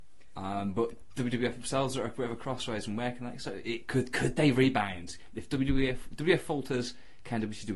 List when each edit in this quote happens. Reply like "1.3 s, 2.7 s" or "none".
none

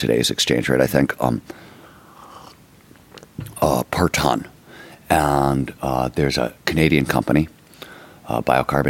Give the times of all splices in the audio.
6.6 s

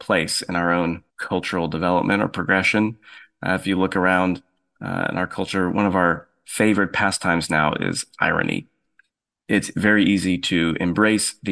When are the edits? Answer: 1.1 s

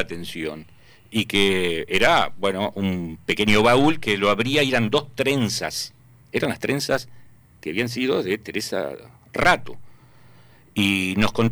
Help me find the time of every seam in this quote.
none

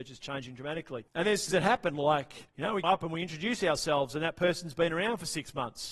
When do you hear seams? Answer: 1.1 s, 1.5 s, 2.5 s, 2.8 s

